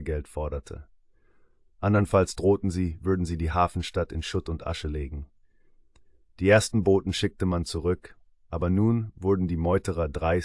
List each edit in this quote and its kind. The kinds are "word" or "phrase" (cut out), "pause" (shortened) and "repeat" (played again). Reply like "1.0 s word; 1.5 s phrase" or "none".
none